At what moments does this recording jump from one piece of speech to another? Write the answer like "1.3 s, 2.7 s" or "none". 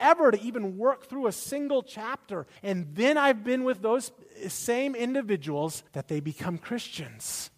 2.6 s, 5.9 s